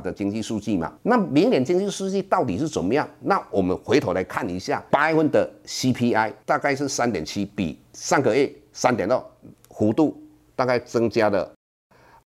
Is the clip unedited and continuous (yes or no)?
no